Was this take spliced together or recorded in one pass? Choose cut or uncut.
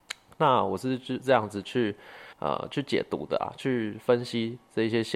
cut